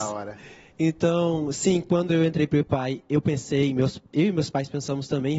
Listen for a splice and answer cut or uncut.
uncut